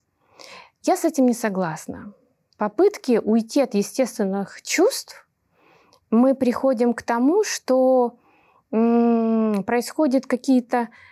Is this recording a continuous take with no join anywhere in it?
yes; 0 cuts

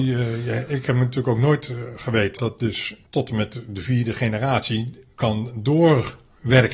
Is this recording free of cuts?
no; 1 cut; at 2.4 s

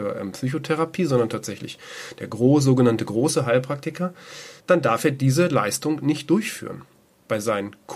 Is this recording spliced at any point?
yes; 1 cut; at 4.6 s

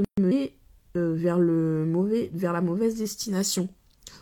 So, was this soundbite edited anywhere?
no; 0 cuts

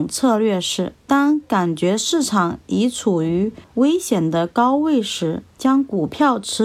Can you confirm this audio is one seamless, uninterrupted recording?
no; 3 cuts; at 1.0 s, 3.6 s, 5.5 s

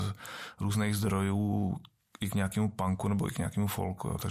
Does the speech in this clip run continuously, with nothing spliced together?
yes; 0 cuts

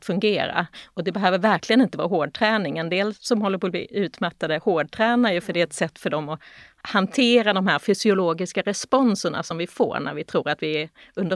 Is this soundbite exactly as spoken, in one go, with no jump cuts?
yes; 0 cuts

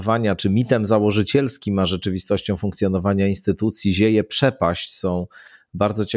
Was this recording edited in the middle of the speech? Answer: no; 0 cuts

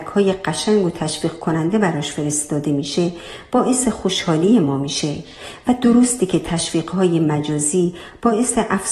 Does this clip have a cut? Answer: no; 0 cuts

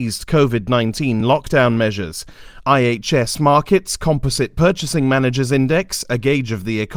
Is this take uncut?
yes; 0 cuts

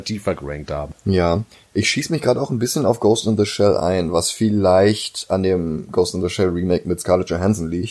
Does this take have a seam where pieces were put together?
no; 0 cuts

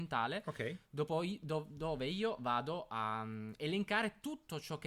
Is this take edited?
no; 0 cuts

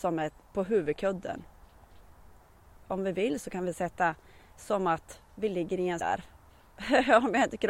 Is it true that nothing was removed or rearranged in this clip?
no; 1 cut; at 6.0 s

